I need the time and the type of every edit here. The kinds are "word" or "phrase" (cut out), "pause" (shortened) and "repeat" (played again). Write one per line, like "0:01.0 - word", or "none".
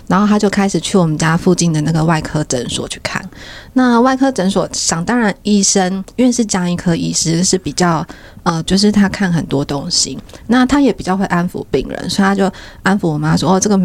0:08.7 - word